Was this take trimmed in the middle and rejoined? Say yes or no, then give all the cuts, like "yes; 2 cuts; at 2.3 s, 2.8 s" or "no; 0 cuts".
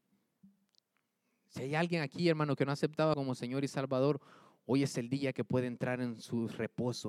yes; 1 cut; at 3.1 s